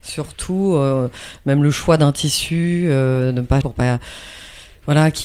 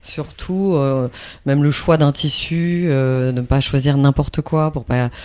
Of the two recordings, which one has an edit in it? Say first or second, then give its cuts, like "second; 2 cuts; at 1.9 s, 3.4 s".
first; 1 cut; at 3.6 s